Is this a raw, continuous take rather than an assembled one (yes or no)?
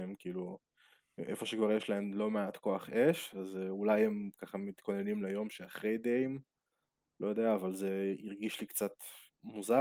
yes